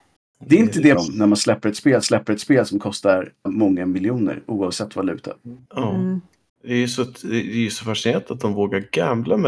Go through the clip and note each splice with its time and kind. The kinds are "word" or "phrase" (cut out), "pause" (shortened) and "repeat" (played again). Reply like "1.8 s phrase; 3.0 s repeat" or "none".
0.9 s phrase; 2.0 s repeat; 3.5 s word; 5.7 s pause